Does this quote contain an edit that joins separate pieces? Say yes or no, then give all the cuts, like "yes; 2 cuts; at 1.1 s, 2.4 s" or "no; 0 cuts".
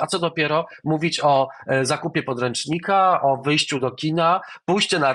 no; 0 cuts